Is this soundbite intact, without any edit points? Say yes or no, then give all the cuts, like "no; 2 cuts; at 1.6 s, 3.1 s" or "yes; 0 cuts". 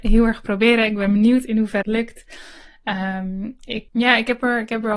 no; 2 cuts; at 1.8 s, 3.9 s